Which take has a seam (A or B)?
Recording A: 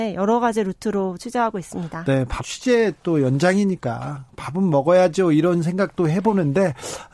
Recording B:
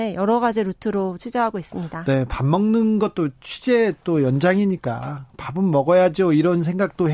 A